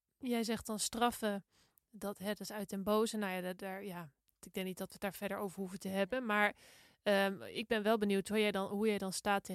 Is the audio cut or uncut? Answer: uncut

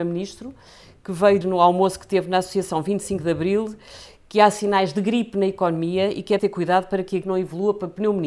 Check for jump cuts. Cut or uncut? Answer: cut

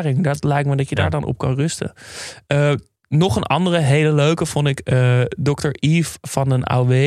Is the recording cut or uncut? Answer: uncut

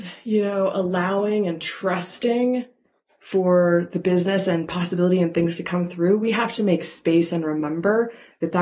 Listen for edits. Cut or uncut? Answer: uncut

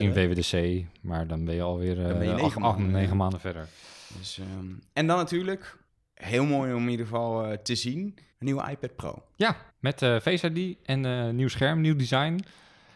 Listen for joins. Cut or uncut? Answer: cut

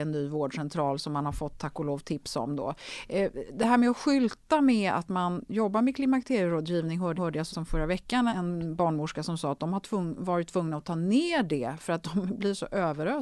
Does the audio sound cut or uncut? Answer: cut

